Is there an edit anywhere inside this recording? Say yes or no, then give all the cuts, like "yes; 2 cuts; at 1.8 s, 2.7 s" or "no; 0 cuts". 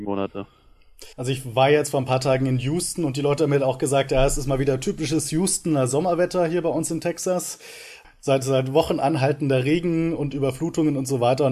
yes; 1 cut; at 1.1 s